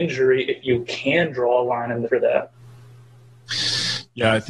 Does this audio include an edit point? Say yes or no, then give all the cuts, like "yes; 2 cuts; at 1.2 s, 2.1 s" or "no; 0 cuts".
yes; 1 cut; at 2.1 s